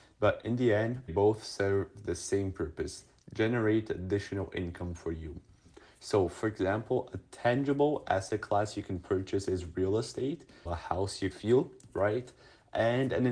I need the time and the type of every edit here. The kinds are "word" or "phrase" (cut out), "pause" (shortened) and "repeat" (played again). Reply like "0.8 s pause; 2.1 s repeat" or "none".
1.1 s word; 10.7 s word; 11.3 s word